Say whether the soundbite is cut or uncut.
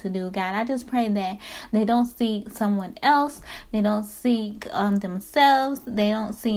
uncut